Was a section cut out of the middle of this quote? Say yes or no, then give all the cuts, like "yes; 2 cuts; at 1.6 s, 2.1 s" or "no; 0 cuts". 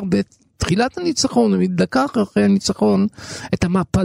no; 0 cuts